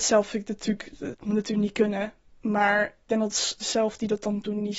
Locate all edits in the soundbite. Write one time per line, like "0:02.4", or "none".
0:01.1
0:03.1
0:03.6